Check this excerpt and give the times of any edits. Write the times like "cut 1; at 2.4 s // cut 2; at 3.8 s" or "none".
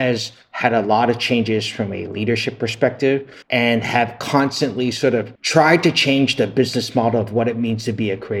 cut 1; at 3.4 s // cut 2; at 5.4 s